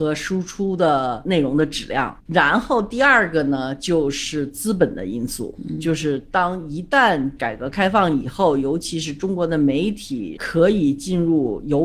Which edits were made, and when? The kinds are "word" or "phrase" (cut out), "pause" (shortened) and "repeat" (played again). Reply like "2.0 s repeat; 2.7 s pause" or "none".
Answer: 2.2 s pause